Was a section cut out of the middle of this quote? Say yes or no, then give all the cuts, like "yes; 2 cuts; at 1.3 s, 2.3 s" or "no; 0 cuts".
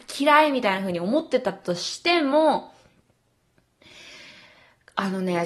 no; 0 cuts